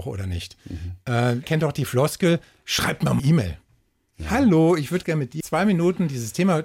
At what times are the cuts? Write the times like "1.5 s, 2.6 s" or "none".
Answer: 1.4 s, 3.2 s, 5.0 s, 5.4 s